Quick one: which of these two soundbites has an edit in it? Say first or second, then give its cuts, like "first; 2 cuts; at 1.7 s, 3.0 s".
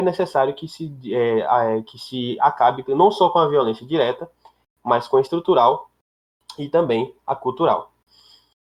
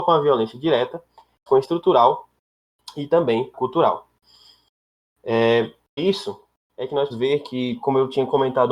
second; 4 cuts; at 1.5 s, 3.5 s, 6.0 s, 7.1 s